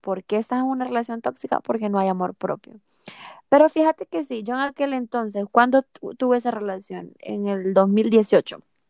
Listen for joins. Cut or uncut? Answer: uncut